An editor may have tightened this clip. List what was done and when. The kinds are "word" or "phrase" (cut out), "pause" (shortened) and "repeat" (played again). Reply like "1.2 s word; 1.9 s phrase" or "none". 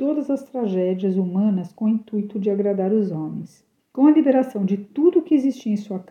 3.8 s pause